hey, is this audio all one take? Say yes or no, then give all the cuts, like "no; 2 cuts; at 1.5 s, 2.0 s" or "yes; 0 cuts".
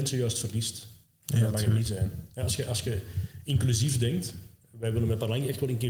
yes; 0 cuts